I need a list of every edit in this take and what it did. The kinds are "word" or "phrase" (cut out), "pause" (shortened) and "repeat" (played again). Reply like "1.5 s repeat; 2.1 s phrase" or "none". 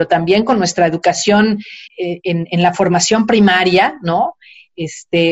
1.9 s word